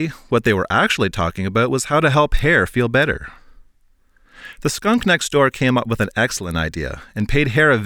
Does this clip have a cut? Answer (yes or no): no